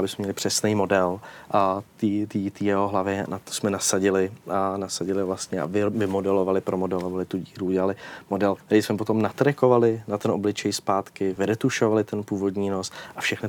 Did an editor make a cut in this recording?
no; 0 cuts

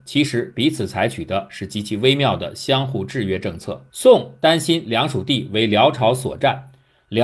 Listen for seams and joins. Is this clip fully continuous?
no; 1 cut; at 3.9 s

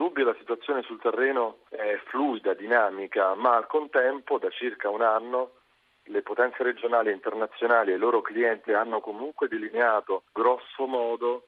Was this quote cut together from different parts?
yes; 3 cuts; at 1.7 s, 8.7 s, 10.3 s

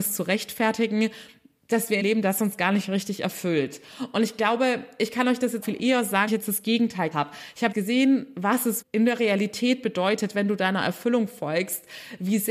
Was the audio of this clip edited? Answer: yes; 6 cuts; at 2.0 s, 5.6 s, 6.3 s, 7.1 s, 7.7 s, 8.8 s

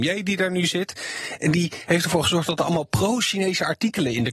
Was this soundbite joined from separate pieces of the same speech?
no; 0 cuts

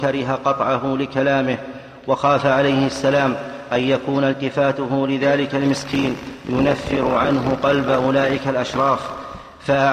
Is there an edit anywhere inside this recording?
no; 0 cuts

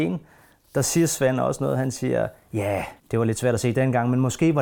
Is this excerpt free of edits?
no; 1 cut; at 3.0 s

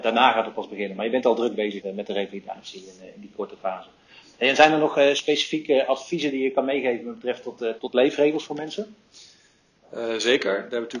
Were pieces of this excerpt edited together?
yes; 2 cuts; at 1.8 s, 7.8 s

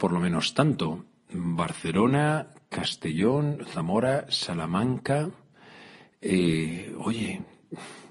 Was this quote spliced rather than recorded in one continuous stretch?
no; 0 cuts

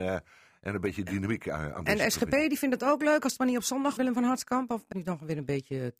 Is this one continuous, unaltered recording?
no; 2 cuts; at 4.0 s, 4.9 s

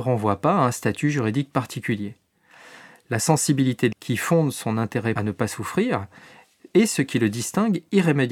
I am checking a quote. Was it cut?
yes; 2 cuts; at 3.9 s, 5.2 s

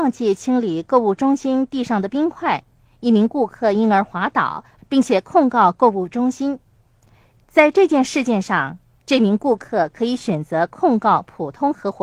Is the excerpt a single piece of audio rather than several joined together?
yes; 0 cuts

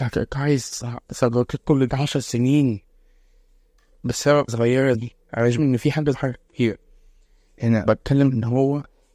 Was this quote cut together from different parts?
yes; 6 cuts; at 1.9 s, 4.5 s, 4.9 s, 5.6 s, 6.1 s, 7.8 s

